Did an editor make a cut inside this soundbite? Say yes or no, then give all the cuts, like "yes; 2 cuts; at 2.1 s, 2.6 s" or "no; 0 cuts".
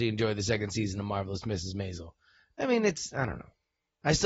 no; 0 cuts